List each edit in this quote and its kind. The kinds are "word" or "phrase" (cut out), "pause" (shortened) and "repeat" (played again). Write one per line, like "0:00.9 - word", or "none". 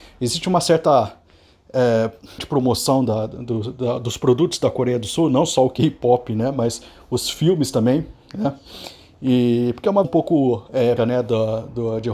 0:02.4 - word
0:10.0 - word
0:11.0 - word